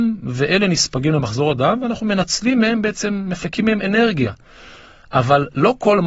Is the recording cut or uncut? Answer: uncut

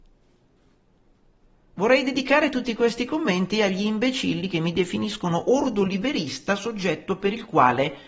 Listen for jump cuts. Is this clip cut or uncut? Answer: uncut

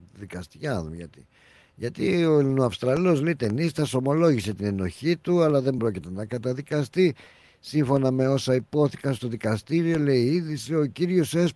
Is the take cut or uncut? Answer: uncut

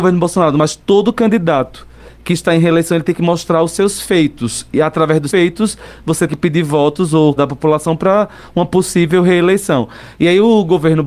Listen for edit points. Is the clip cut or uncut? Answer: cut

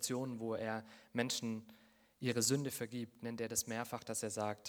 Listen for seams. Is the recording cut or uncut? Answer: uncut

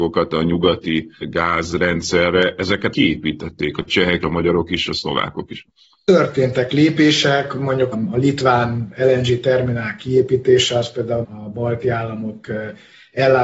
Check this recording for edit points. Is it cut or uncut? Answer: cut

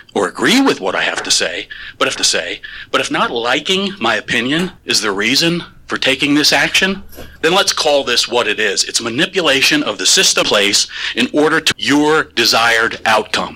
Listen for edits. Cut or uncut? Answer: cut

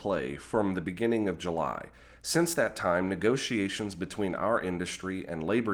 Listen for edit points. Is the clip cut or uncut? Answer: uncut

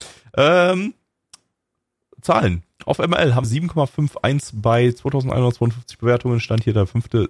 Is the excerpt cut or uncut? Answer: cut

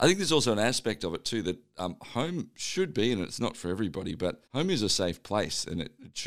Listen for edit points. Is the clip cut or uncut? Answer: cut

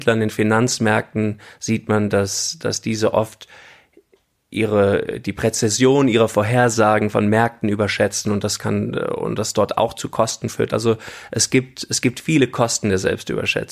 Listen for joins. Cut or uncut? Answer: uncut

